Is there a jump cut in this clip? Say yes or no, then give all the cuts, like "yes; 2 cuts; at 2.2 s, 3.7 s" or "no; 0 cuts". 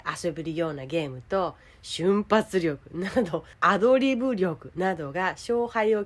no; 0 cuts